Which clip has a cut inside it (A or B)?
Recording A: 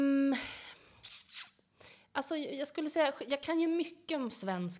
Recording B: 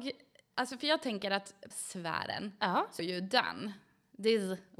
B